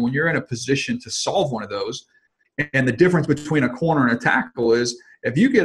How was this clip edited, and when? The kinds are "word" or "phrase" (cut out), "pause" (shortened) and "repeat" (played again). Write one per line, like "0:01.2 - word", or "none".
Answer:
none

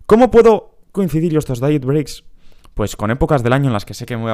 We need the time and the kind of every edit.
0:00.9 - word

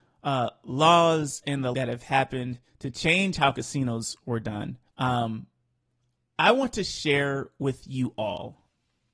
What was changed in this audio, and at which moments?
0:01.7 - word
0:04.9 - pause

